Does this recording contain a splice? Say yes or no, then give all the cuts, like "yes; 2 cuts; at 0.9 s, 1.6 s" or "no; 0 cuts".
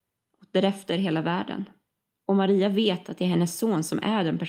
no; 0 cuts